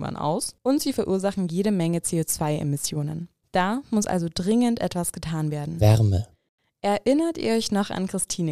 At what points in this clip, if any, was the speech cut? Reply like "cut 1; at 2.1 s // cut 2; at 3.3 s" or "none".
none